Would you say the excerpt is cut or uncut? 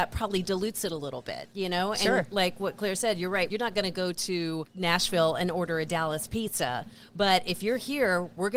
uncut